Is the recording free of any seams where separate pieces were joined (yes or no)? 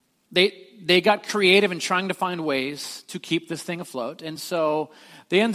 yes